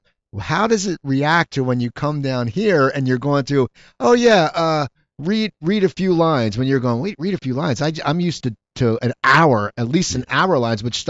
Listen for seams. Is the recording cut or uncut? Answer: uncut